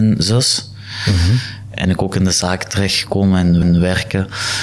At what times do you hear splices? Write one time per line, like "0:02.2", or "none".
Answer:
0:01.8
0:03.6